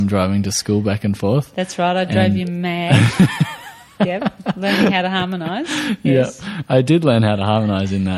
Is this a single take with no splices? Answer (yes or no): yes